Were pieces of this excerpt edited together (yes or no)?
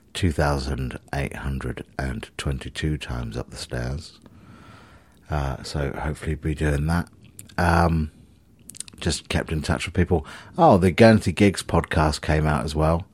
no